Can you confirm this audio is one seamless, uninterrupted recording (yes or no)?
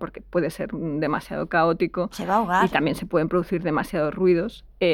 yes